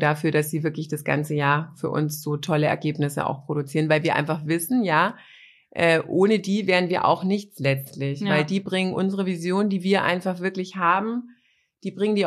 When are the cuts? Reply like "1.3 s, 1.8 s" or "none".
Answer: none